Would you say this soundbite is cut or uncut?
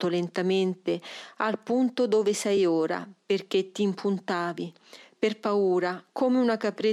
uncut